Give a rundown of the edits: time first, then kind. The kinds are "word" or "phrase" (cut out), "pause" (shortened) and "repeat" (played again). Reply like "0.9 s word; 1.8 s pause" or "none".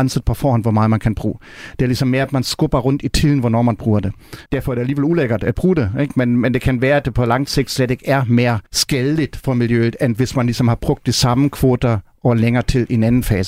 4.5 s pause; 8.7 s pause